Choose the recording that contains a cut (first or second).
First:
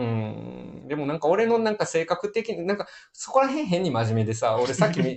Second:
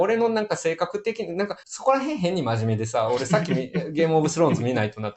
second